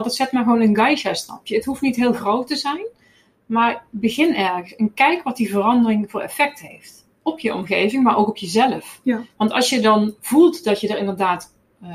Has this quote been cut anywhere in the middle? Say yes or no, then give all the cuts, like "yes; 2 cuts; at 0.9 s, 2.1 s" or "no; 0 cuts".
no; 0 cuts